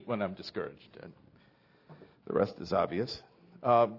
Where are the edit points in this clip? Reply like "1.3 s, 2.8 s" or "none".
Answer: none